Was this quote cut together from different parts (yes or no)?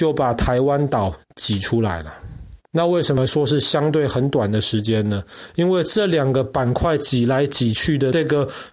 yes